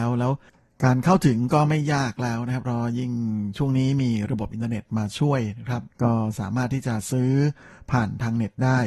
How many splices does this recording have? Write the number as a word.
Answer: one